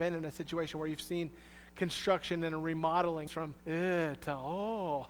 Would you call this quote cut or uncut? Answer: cut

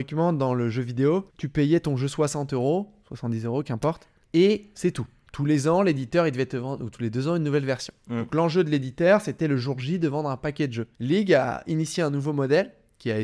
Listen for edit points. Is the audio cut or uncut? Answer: cut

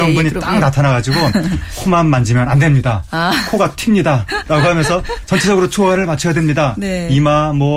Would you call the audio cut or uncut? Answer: uncut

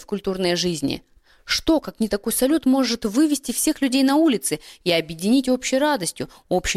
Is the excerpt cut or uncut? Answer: uncut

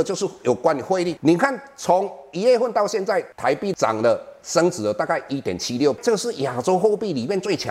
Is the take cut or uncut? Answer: cut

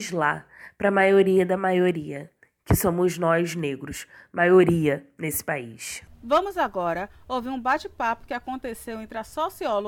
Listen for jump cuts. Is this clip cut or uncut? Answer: uncut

